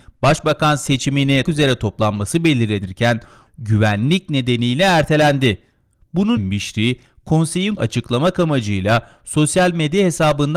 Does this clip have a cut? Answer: yes; 4 cuts; at 1.4 s, 3.5 s, 6.4 s, 7.8 s

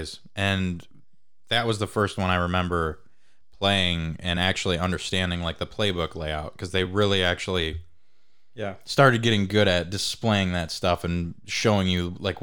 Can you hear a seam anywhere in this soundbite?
no; 0 cuts

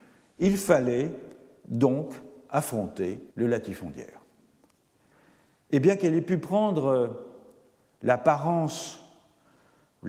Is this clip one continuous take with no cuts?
no; 1 cut; at 3.3 s

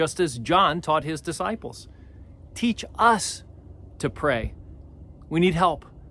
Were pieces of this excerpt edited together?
no; 0 cuts

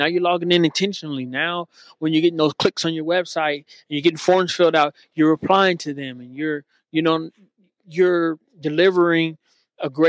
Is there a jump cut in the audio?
no; 0 cuts

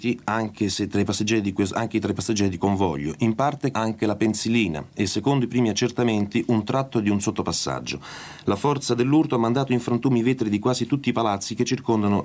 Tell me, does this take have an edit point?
yes; 2 cuts; at 2.6 s, 3.7 s

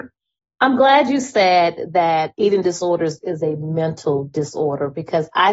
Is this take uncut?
yes; 0 cuts

